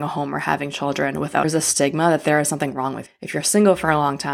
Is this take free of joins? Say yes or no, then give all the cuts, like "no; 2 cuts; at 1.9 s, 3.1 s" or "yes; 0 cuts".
no; 2 cuts; at 1.4 s, 3.1 s